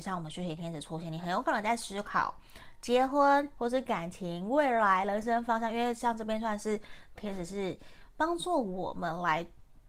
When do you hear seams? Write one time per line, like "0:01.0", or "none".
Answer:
0:07.2